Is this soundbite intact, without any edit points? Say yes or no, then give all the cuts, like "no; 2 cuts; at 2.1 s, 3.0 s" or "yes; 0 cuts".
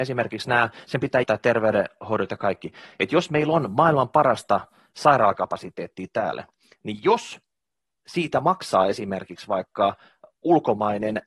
no; 1 cut; at 1.2 s